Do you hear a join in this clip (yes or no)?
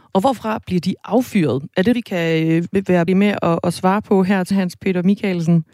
yes